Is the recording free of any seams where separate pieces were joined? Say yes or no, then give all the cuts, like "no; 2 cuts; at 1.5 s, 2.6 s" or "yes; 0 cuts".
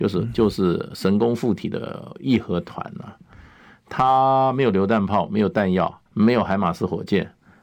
no; 1 cut; at 6.1 s